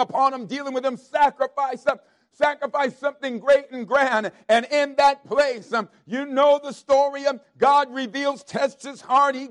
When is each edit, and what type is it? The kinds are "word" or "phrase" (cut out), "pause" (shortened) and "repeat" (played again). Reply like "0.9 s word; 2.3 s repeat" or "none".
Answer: none